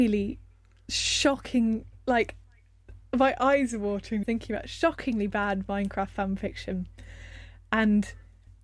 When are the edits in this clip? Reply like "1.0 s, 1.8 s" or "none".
4.2 s